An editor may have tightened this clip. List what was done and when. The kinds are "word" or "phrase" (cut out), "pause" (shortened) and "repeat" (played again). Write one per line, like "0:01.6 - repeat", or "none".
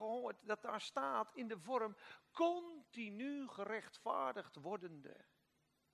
none